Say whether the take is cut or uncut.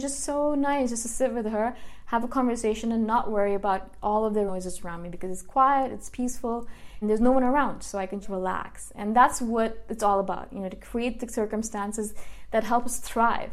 cut